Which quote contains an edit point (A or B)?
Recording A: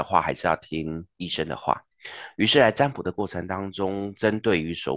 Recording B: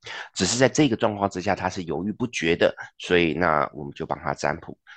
A